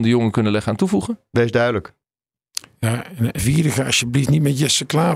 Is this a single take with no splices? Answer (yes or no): no